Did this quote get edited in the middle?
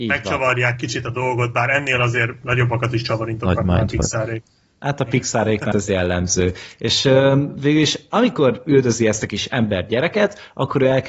yes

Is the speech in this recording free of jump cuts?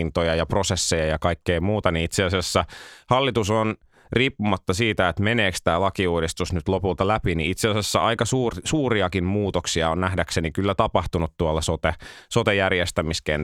yes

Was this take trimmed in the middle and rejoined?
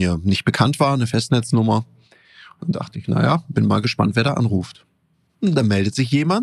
no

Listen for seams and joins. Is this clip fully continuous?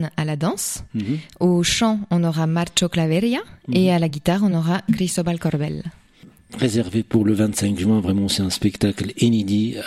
yes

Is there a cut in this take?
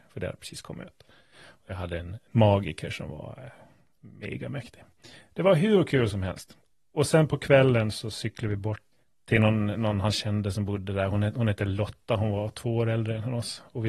no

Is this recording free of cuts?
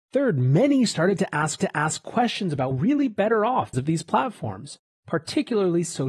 no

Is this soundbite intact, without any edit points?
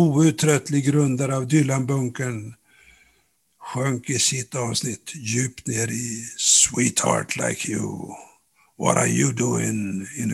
yes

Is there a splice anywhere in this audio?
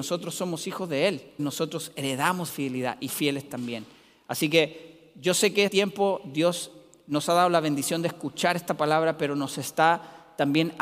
yes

